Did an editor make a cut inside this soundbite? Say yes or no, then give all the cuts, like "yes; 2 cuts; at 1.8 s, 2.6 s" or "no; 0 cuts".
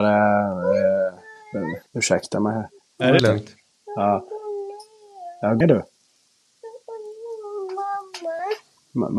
yes; 3 cuts; at 1.9 s, 3.2 s, 5.6 s